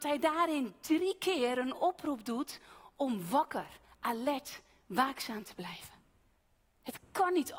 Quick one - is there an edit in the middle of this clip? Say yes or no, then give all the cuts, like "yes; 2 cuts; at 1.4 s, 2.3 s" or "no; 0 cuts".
no; 0 cuts